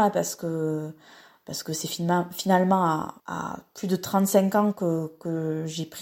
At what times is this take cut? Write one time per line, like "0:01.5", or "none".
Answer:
0:03.2